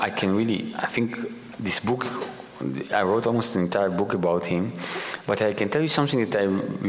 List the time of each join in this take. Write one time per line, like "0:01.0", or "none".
none